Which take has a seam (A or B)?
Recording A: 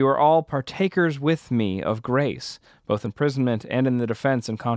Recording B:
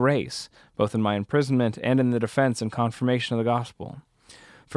A